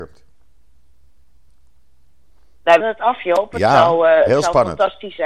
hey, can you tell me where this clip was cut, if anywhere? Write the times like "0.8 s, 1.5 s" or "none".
2.8 s